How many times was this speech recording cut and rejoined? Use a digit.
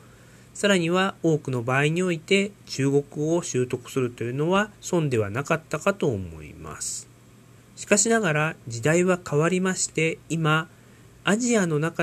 3